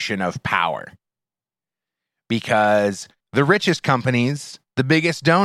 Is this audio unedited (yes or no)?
no